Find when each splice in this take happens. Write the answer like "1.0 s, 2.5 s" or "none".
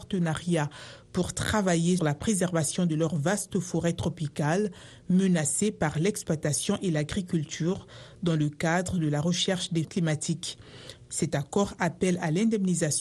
2.0 s, 9.8 s